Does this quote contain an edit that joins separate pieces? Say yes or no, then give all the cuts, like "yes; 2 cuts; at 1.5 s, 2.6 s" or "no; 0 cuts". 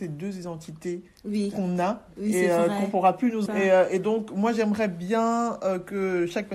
yes; 1 cut; at 3.5 s